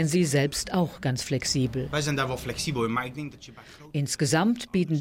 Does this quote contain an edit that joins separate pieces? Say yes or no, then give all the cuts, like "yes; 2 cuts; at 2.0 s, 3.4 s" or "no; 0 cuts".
no; 0 cuts